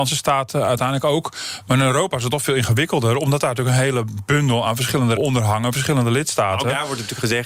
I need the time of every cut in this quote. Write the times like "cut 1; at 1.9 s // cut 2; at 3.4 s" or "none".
cut 1; at 5.2 s